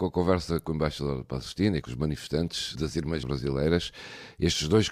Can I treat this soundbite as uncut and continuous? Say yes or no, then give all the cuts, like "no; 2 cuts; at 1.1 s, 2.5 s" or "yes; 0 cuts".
no; 3 cuts; at 1.8 s, 2.7 s, 3.2 s